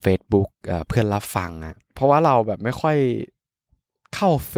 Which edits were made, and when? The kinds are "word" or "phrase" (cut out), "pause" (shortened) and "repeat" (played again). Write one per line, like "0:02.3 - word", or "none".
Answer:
0:01.8 - pause